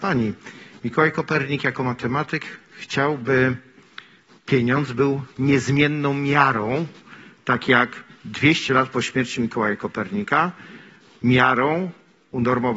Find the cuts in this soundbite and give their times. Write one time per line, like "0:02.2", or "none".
none